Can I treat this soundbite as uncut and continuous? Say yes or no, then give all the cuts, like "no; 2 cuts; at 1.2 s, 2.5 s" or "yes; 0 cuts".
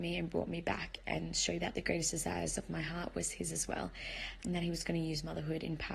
no; 2 cuts; at 1.6 s, 4.4 s